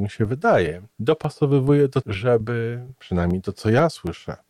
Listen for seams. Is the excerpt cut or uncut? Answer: cut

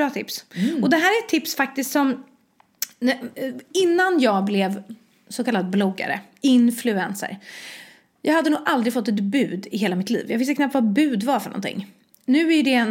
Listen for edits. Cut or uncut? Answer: uncut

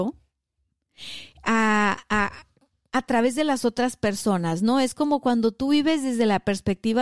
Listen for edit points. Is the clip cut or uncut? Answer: uncut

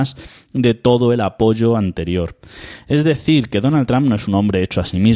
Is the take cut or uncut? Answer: uncut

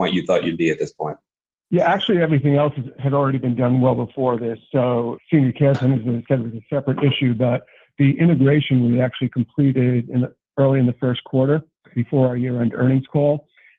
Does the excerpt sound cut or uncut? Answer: uncut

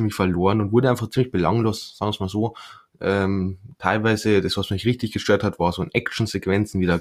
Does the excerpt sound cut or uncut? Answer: uncut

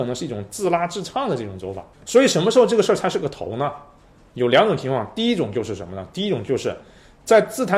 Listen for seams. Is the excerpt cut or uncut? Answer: cut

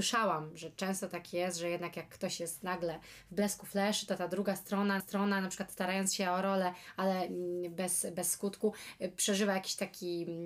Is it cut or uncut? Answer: cut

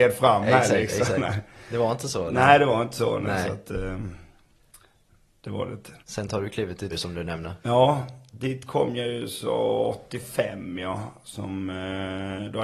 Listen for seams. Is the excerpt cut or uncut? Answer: cut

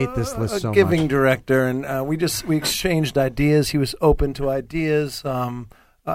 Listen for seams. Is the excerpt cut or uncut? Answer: uncut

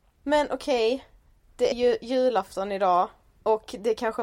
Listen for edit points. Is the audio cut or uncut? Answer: cut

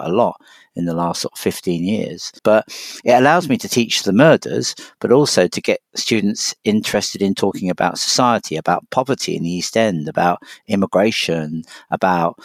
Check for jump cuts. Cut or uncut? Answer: cut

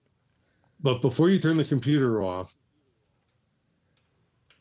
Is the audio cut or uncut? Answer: uncut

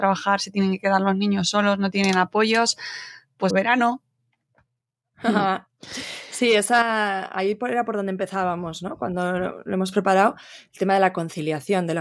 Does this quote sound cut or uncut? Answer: cut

